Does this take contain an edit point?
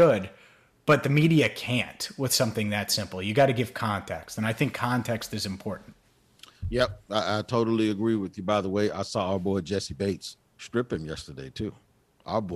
yes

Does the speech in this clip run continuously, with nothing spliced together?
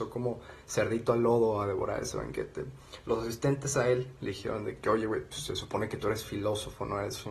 yes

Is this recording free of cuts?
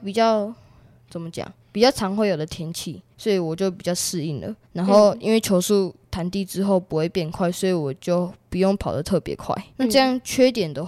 no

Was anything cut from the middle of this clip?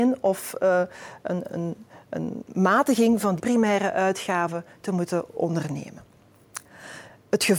yes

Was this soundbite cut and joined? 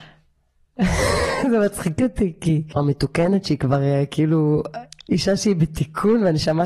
no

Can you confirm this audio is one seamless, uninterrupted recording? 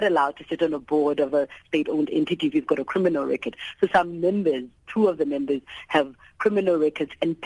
yes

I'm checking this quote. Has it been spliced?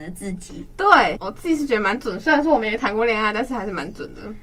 yes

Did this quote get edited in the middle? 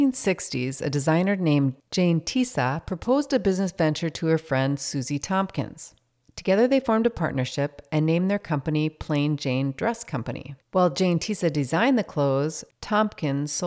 yes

